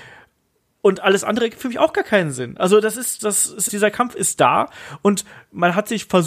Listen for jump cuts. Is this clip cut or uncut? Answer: cut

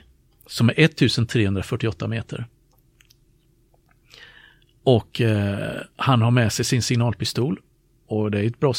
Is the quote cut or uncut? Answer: uncut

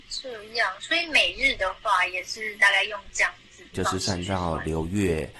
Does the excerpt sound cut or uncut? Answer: cut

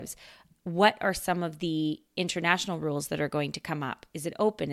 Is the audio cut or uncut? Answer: uncut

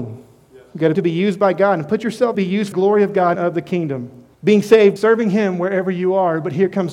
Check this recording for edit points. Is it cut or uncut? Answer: cut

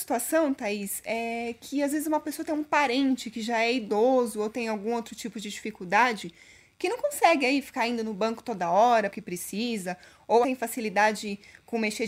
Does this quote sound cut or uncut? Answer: cut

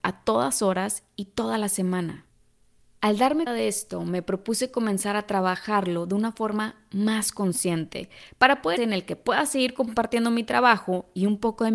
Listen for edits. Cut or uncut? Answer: cut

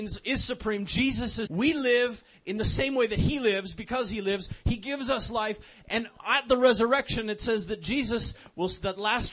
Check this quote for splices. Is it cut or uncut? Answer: cut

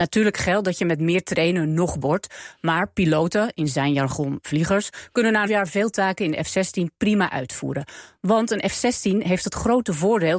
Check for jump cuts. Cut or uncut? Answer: cut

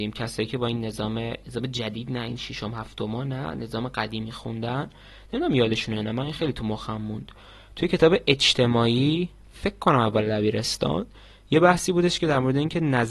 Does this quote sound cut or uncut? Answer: uncut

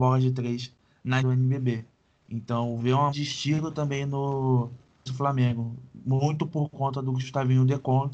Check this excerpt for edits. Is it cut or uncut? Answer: cut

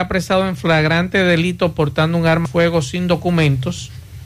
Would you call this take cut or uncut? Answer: cut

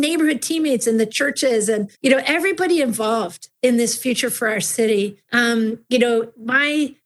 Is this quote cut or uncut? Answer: cut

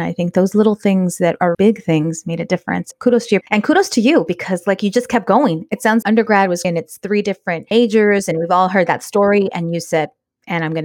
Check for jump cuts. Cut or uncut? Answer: cut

